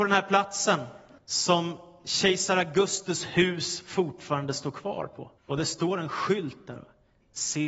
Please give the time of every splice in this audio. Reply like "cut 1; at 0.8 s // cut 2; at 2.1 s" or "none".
cut 1; at 1.2 s // cut 2; at 5.4 s